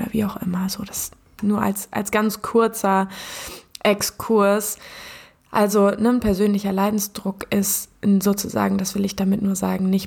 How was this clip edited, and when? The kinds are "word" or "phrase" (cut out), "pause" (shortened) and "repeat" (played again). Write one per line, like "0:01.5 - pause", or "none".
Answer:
none